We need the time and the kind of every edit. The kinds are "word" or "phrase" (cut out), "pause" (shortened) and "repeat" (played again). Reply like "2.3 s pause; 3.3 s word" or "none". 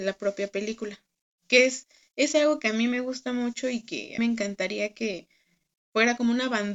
4.2 s phrase

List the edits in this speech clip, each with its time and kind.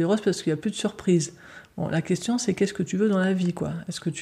none

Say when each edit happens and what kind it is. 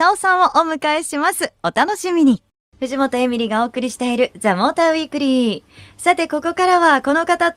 none

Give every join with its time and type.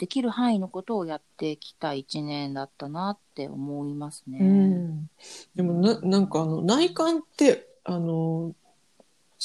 1.3 s pause

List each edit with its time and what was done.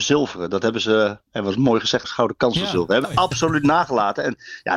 2.0 s word; 3.0 s word

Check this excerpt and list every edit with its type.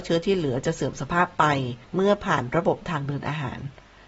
1.8 s pause

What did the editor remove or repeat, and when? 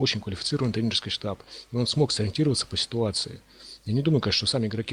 none

